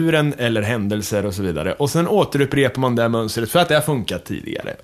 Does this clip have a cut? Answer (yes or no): no